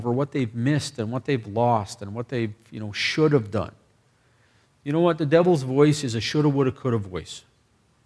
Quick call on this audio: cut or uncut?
uncut